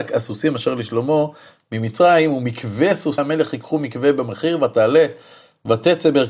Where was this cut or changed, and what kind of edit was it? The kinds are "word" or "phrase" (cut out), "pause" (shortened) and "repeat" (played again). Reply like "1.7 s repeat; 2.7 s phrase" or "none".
3.2 s word